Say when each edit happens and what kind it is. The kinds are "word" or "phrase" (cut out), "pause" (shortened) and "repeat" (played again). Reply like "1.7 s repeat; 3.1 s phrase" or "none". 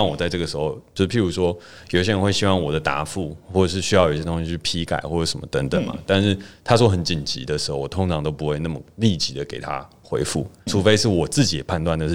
10.7 s word